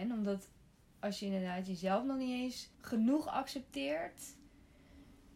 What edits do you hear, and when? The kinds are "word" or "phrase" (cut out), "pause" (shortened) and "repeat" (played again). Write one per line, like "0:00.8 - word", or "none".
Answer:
0:02.7 - pause